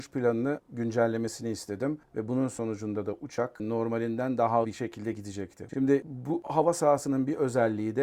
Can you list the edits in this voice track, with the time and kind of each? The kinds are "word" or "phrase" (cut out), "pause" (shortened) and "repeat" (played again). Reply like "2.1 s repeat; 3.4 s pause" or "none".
4.6 s word